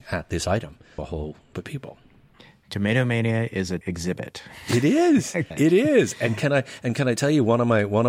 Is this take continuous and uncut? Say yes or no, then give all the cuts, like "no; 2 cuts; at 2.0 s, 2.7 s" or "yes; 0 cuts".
no; 4 cuts; at 1.0 s, 1.5 s, 3.8 s, 5.5 s